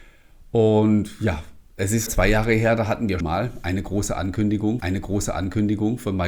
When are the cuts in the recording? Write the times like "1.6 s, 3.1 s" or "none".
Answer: 1.7 s, 2.1 s, 3.2 s, 4.8 s